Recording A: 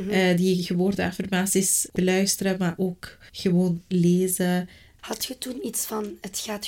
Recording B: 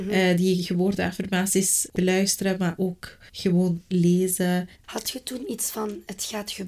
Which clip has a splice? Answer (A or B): B